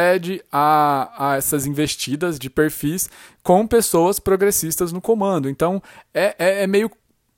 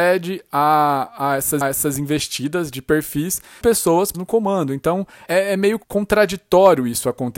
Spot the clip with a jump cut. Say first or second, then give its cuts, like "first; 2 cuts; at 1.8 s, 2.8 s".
second; 5 cuts; at 1.6 s, 3.6 s, 4.1 s, 5.3 s, 5.8 s